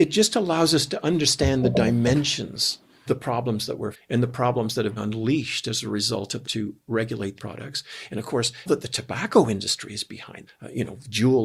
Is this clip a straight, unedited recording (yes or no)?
no